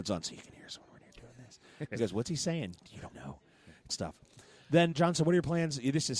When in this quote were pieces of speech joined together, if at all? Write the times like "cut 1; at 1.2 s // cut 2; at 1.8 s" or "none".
cut 1; at 1.0 s // cut 2; at 2.0 s // cut 3; at 3.1 s // cut 4; at 3.9 s // cut 5; at 4.9 s